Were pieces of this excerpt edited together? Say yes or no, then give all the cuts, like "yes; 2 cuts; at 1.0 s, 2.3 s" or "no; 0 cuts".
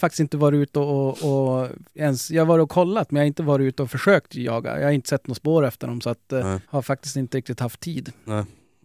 yes; 1 cut; at 6.6 s